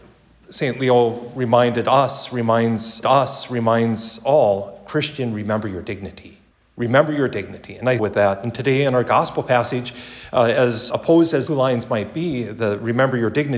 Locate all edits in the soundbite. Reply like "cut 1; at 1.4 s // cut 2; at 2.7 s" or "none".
cut 1; at 3.0 s // cut 2; at 6.5 s // cut 3; at 8.0 s // cut 4; at 10.9 s // cut 5; at 11.5 s